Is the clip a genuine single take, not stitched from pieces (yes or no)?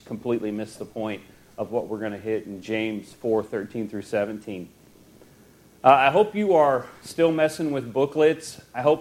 yes